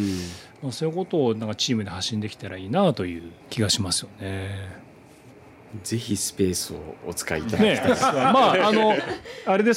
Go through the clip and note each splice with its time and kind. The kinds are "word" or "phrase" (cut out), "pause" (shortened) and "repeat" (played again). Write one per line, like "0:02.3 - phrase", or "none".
0:03.4 - pause
0:08.0 - word